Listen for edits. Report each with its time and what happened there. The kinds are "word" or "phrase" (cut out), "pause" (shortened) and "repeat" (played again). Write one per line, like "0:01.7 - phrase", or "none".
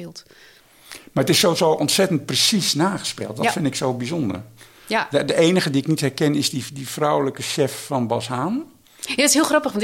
none